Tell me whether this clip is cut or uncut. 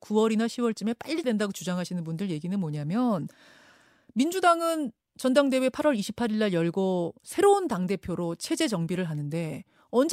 cut